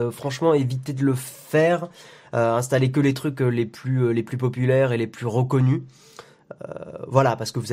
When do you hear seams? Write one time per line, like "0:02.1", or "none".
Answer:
none